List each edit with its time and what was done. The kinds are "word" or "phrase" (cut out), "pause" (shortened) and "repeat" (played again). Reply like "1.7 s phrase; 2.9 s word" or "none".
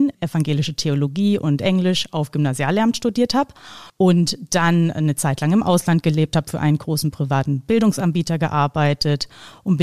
3.9 s pause